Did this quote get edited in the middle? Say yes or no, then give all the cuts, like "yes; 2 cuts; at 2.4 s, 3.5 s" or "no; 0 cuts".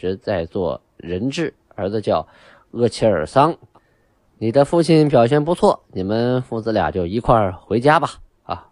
no; 0 cuts